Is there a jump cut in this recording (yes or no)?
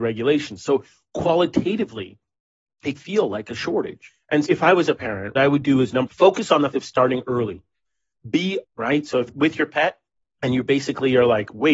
yes